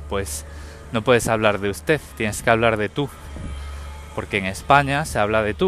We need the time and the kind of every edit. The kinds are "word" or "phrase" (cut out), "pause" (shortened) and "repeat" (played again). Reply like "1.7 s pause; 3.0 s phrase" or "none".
none